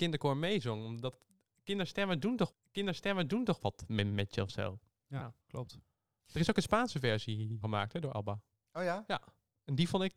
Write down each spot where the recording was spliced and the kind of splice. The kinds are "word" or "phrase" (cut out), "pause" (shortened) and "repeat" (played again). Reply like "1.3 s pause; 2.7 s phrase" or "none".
2.5 s repeat; 5.4 s pause; 7.6 s word

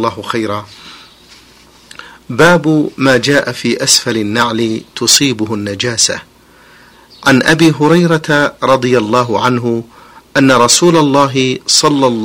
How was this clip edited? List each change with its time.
none

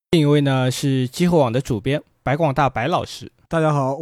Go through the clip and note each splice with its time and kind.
2.1 s pause

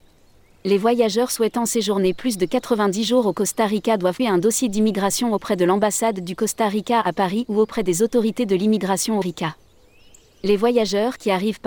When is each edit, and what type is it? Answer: 4.2 s word; 9.2 s phrase

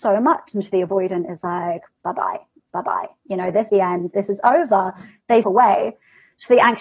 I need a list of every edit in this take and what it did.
2.6 s repeat; 3.7 s word; 5.4 s word

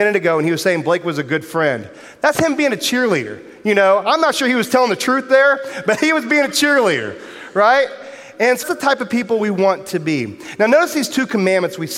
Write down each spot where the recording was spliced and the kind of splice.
8.6 s word

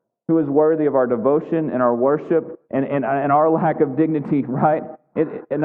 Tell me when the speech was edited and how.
2.7 s pause

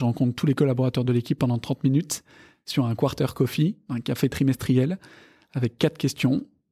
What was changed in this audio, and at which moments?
none

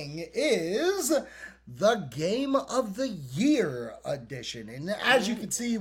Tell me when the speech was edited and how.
none

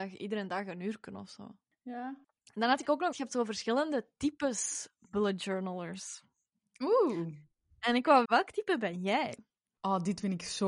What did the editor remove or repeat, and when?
3.1 s word; 8.2 s word

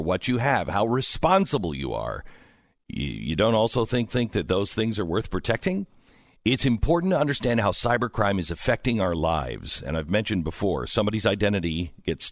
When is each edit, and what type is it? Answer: 4.1 s repeat

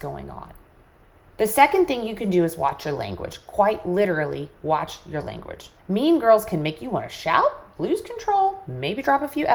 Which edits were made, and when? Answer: 5.8 s pause

